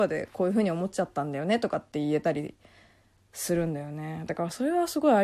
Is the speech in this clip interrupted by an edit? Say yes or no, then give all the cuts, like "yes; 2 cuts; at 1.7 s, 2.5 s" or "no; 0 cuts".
no; 0 cuts